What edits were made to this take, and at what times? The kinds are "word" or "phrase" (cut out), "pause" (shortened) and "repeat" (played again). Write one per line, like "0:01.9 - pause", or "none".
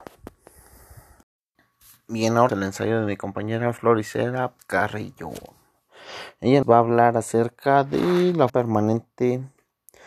0:02.5 - word
0:04.6 - word
0:06.6 - word
0:08.5 - word